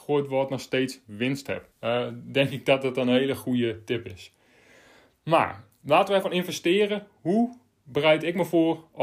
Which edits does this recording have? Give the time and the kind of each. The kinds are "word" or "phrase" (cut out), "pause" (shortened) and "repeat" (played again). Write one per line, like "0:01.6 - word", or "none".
0:01.7 - pause
0:06.2 - phrase